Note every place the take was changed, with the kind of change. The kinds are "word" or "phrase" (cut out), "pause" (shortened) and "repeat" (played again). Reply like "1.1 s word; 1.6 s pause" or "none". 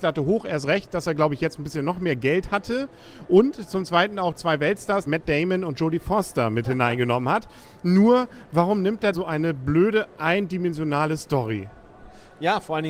5.1 s word; 9.1 s word